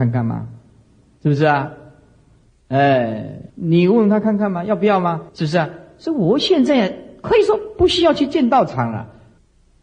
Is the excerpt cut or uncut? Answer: cut